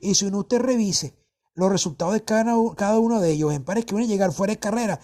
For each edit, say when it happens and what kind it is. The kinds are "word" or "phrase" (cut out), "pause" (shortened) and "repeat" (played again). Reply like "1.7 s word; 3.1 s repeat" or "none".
none